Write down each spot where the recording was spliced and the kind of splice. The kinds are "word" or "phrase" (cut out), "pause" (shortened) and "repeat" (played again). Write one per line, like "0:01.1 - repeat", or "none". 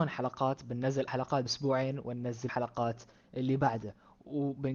0:01.1 - word
0:01.5 - phrase
0:02.5 - word